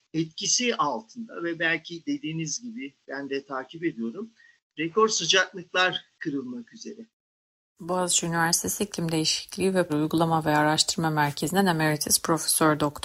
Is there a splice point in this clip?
yes; 1 cut; at 9.9 s

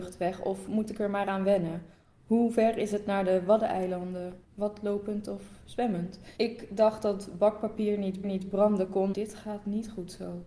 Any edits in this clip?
yes; 4 cuts; at 4.4 s, 6.4 s, 8.2 s, 9.1 s

